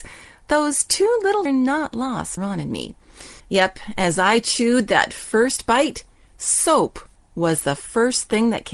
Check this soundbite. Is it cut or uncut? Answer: cut